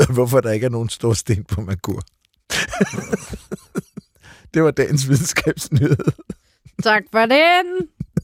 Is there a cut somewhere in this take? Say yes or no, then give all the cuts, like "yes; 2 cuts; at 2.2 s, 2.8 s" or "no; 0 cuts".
no; 0 cuts